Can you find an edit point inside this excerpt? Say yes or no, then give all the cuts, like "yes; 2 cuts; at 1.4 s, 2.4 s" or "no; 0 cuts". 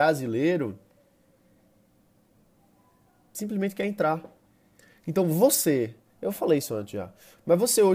no; 0 cuts